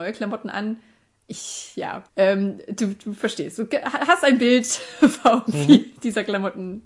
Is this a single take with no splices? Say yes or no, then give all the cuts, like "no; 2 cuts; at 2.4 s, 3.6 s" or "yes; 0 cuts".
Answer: no; 1 cut; at 2.1 s